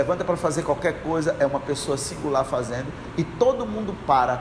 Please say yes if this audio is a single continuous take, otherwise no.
yes